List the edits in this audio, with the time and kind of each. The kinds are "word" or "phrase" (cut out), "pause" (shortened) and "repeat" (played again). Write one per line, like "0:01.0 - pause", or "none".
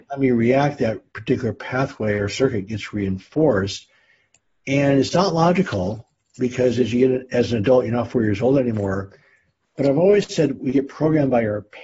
none